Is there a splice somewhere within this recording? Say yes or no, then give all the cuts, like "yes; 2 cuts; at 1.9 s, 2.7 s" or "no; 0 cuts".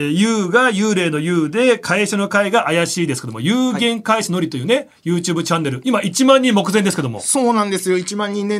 yes; 1 cut; at 5.0 s